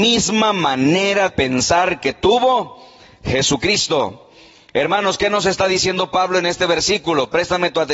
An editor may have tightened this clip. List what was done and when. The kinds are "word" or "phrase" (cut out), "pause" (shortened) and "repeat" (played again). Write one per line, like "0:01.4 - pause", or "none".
0:01.3 - word